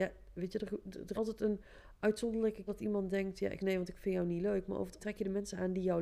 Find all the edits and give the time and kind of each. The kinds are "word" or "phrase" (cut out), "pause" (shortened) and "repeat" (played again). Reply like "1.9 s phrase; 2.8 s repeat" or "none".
1.1 s word; 2.7 s word; 3.6 s word; 5.0 s word